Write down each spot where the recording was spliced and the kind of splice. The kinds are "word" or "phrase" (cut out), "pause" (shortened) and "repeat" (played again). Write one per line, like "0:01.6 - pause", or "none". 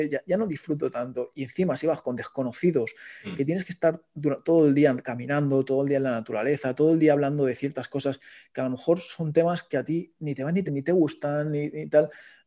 0:10.7 - word